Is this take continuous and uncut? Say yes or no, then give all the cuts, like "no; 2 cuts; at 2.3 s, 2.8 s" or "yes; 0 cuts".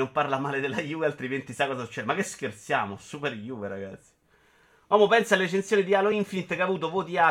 yes; 0 cuts